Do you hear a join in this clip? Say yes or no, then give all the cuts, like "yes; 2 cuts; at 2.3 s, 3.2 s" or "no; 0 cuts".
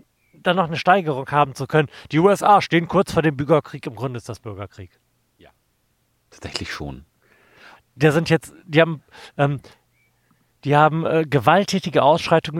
no; 0 cuts